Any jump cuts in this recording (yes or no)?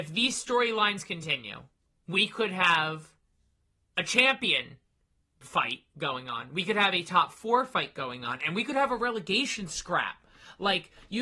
no